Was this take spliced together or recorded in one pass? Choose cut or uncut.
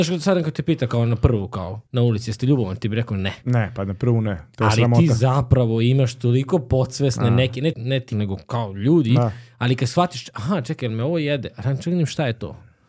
cut